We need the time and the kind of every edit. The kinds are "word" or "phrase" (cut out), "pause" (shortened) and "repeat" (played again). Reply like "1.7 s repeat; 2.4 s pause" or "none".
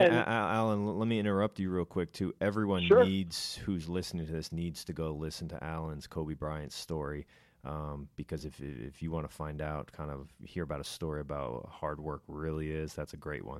none